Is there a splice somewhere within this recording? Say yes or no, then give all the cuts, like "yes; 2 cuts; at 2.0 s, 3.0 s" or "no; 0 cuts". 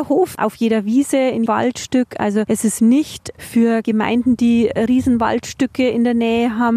yes; 3 cuts; at 1.5 s, 2.8 s, 3.8 s